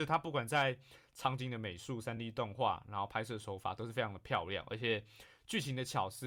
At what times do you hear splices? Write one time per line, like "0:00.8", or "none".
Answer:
none

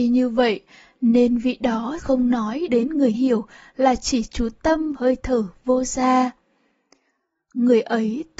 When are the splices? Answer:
0:02.0
0:02.7
0:03.1
0:04.9

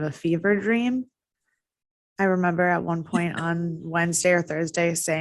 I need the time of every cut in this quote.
none

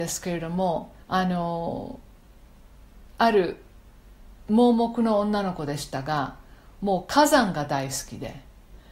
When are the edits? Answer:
0:01.0
0:03.1

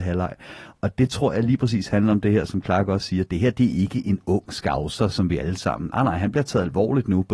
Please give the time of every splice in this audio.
none

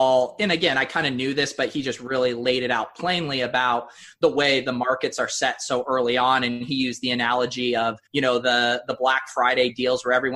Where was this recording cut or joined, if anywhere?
0:08.1

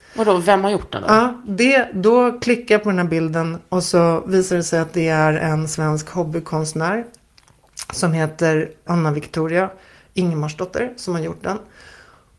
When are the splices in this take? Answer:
0:08.9

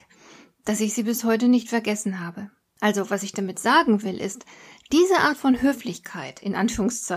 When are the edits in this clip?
none

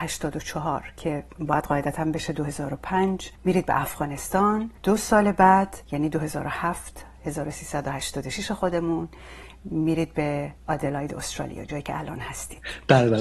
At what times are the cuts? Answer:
0:03.4
0:04.8
0:05.8
0:10.6

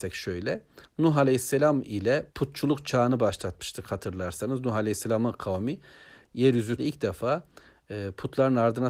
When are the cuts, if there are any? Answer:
0:02.3
0:06.8

